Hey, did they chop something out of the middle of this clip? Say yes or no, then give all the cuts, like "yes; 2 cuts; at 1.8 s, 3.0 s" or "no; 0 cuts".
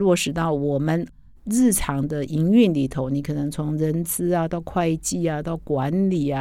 no; 0 cuts